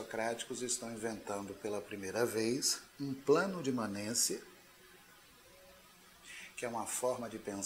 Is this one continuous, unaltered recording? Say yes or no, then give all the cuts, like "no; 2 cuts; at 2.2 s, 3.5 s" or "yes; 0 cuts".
no; 1 cut; at 2.9 s